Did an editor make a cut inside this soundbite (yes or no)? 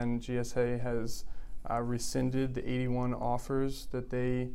no